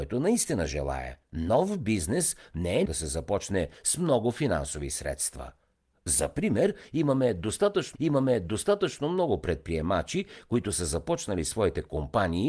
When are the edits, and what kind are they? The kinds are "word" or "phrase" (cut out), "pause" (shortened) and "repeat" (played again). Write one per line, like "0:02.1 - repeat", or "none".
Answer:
0:01.2 - pause
0:02.9 - word
0:08.0 - repeat